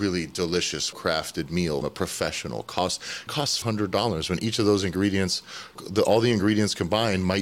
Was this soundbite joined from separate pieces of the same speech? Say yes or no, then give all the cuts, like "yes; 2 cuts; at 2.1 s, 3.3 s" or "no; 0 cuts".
yes; 5 cuts; at 0.9 s, 1.8 s, 3.3 s, 3.6 s, 5.8 s